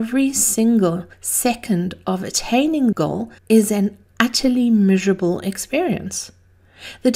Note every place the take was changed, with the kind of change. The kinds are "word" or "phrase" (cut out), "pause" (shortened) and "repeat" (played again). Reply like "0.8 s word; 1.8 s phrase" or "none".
1.1 s pause; 2.9 s word; 3.4 s pause